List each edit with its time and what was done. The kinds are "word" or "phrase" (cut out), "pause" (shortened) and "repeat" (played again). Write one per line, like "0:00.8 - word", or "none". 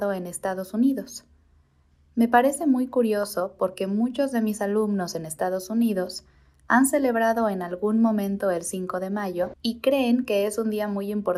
none